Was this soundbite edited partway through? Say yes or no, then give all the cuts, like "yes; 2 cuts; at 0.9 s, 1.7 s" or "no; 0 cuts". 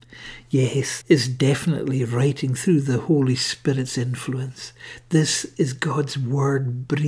yes; 1 cut; at 1.0 s